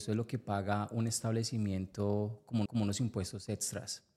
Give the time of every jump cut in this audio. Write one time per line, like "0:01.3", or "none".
0:02.7